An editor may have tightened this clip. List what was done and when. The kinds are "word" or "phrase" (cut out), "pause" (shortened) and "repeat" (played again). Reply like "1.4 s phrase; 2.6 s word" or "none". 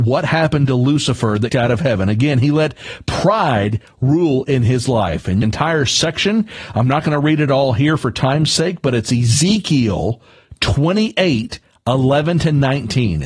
1.5 s phrase; 5.4 s phrase